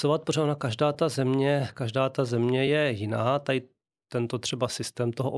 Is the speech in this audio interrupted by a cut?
no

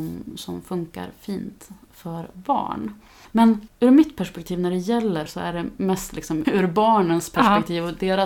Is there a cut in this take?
yes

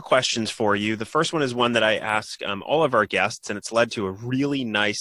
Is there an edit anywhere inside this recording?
no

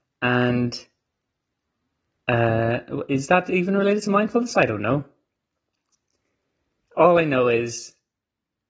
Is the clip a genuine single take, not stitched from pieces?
yes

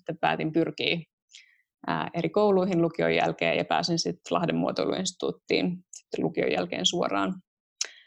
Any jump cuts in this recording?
no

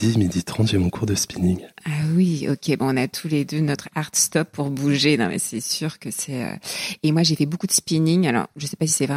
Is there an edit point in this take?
no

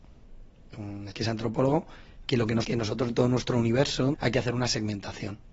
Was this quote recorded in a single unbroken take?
no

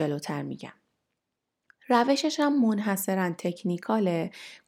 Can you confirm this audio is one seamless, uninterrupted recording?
yes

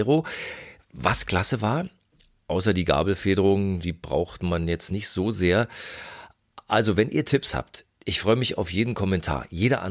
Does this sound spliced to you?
no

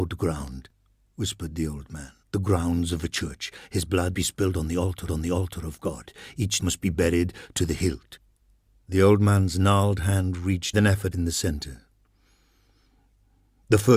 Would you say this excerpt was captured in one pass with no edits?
no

